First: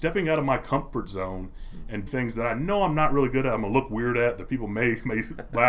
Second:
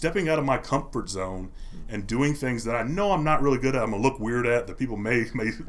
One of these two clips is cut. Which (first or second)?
first